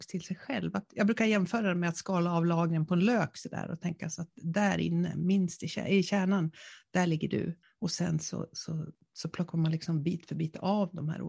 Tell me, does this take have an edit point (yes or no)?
yes